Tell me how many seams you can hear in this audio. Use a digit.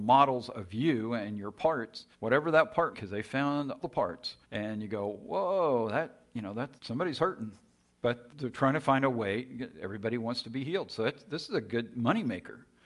6